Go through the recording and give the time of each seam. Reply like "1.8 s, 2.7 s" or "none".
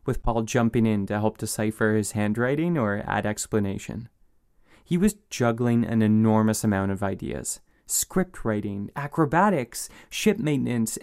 none